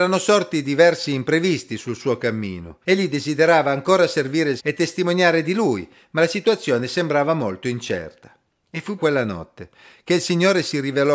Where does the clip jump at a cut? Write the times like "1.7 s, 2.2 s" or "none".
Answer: 2.8 s, 4.6 s, 9.0 s